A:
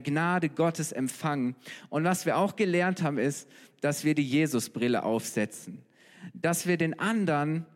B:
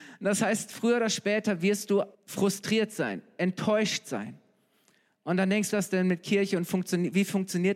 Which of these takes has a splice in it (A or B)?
B